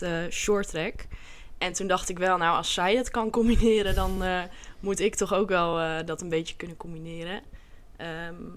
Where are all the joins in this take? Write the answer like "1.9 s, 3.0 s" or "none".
none